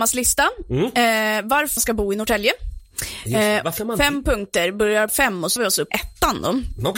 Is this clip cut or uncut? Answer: cut